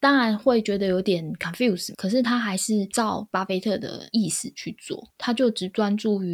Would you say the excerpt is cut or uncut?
cut